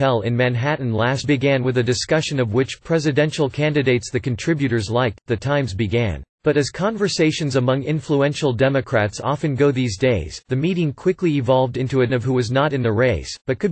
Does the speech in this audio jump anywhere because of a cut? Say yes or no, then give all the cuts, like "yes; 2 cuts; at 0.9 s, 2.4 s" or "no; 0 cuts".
yes; 3 cuts; at 1.2 s, 6.3 s, 12.1 s